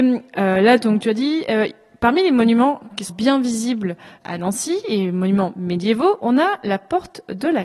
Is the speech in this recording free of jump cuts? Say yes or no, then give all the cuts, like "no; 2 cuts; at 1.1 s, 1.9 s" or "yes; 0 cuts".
no; 1 cut; at 3.1 s